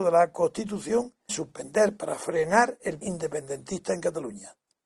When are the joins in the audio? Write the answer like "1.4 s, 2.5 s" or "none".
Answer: 1.3 s, 3.0 s